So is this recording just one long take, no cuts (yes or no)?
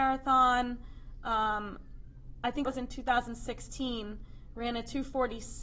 no